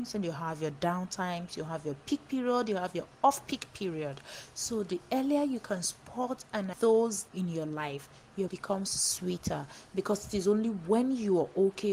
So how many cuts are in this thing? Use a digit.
3